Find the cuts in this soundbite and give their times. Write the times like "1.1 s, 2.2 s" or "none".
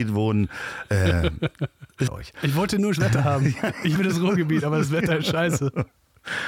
2.1 s, 2.9 s, 4.0 s